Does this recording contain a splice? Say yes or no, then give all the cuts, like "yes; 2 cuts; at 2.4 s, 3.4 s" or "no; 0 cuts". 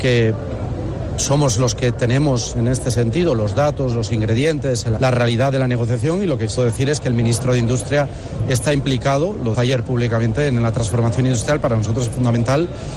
yes; 3 cuts; at 5.0 s, 6.6 s, 9.5 s